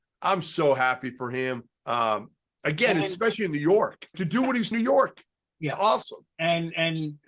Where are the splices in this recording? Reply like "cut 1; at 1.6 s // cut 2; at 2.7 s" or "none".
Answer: cut 1; at 1.8 s // cut 2; at 4.1 s // cut 3; at 4.7 s